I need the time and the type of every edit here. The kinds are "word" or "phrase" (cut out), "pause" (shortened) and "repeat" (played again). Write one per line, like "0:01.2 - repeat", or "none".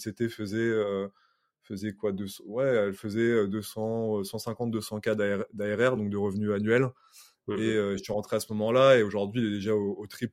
none